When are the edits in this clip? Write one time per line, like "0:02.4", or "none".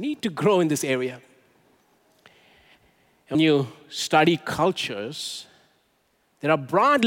0:03.3